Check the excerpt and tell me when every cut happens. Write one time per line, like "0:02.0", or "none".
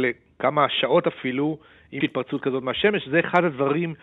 0:02.0